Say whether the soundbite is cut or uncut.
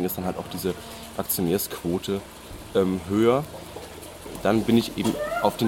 uncut